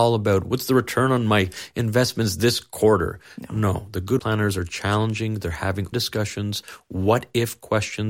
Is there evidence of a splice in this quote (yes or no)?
yes